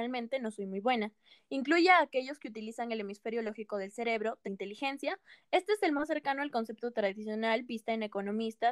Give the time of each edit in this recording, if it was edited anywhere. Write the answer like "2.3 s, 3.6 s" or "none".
4.4 s